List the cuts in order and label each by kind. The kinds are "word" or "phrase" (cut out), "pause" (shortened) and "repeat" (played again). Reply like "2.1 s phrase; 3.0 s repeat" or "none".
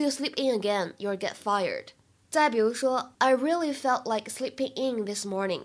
none